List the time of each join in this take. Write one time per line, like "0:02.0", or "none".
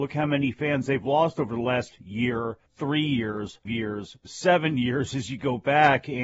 0:02.7
0:03.7